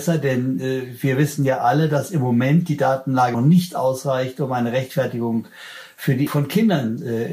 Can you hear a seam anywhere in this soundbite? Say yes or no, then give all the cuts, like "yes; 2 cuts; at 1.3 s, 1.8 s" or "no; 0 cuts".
yes; 2 cuts; at 3.3 s, 6.3 s